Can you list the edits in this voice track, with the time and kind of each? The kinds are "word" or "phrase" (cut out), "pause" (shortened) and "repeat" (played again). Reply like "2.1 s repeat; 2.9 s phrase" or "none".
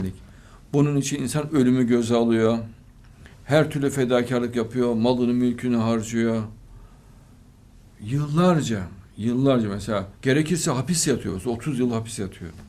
3.3 s pause; 10.1 s pause